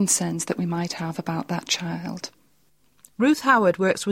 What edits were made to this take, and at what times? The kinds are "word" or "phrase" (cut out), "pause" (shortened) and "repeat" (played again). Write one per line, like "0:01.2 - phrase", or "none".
none